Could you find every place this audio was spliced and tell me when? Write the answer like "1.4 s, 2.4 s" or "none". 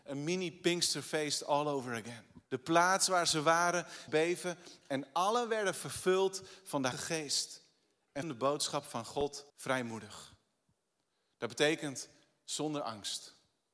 2.5 s, 4.1 s, 6.9 s, 8.2 s, 9.5 s

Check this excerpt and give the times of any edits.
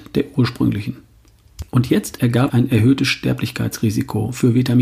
1.7 s, 2.2 s, 2.5 s

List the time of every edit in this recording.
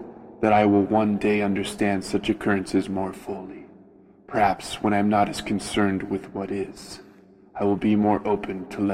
none

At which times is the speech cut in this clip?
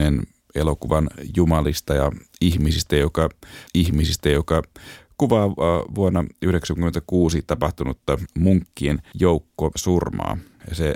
3.7 s, 8.3 s

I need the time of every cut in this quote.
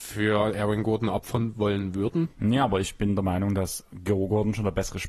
2.3 s

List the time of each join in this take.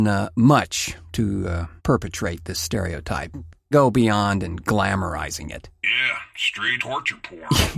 1.8 s, 3.7 s, 6.8 s

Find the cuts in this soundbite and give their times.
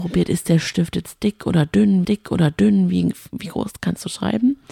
2.0 s

